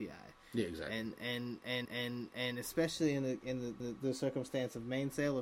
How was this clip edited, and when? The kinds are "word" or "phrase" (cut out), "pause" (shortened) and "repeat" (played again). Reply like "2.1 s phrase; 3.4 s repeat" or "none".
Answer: 1.9 s repeat; 3.8 s repeat